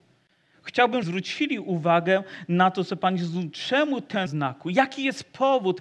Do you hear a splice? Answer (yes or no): yes